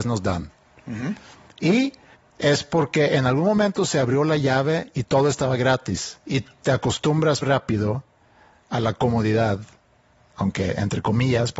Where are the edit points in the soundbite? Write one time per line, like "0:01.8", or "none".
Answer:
0:06.2
0:07.4